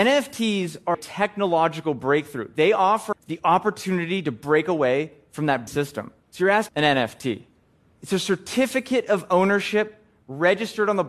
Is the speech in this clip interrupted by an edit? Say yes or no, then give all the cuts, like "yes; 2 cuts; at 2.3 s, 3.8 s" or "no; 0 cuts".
yes; 6 cuts; at 0.9 s, 3.1 s, 5.7 s, 6.2 s, 6.7 s, 7.8 s